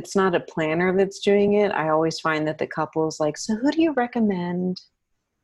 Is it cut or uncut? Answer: uncut